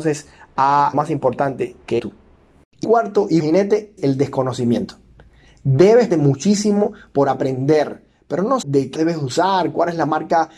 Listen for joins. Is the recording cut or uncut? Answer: cut